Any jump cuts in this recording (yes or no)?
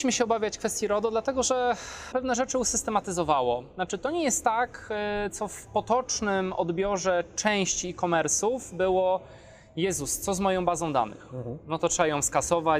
yes